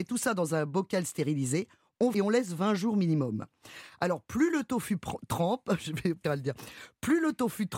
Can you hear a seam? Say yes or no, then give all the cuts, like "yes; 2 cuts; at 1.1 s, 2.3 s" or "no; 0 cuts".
yes; 2 cuts; at 2.1 s, 6.2 s